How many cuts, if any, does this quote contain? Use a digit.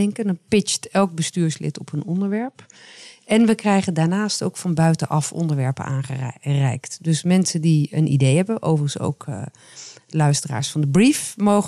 0